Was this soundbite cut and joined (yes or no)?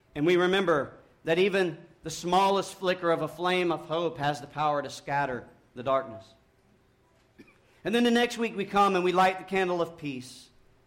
no